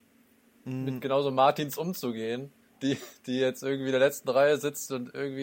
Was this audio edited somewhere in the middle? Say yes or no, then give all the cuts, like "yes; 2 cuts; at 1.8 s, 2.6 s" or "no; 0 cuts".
yes; 1 cut; at 2.6 s